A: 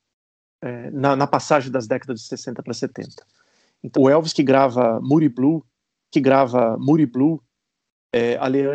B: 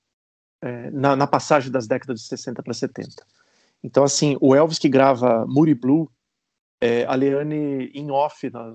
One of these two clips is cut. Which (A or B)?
A